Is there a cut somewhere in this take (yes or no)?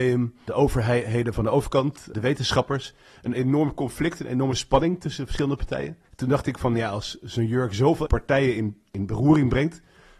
yes